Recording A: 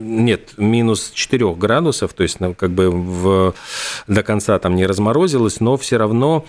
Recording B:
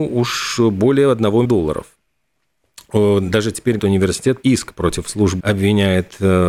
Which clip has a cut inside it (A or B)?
B